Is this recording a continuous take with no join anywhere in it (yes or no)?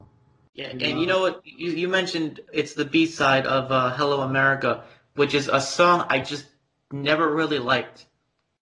yes